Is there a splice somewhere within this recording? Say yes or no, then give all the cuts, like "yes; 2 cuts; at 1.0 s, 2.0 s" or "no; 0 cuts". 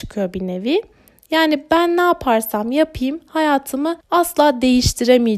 yes; 1 cut; at 4.0 s